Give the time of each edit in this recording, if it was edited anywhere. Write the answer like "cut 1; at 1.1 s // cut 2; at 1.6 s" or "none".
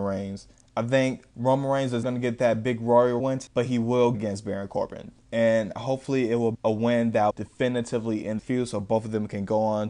cut 1; at 1.3 s // cut 2; at 2.0 s // cut 3; at 3.2 s // cut 4; at 4.1 s // cut 5; at 6.5 s // cut 6; at 7.3 s // cut 7; at 8.4 s